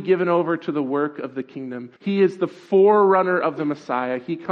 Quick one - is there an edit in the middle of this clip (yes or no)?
yes